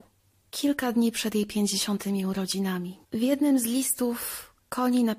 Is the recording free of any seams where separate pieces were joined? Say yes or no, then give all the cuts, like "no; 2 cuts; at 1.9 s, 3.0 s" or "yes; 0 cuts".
no; 1 cut; at 3.0 s